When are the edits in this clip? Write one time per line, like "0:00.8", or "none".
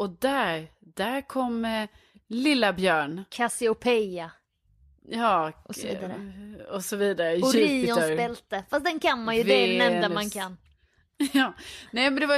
none